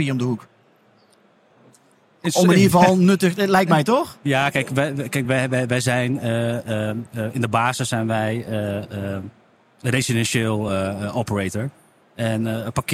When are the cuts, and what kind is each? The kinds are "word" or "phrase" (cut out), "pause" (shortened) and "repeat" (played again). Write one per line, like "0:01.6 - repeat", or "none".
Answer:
none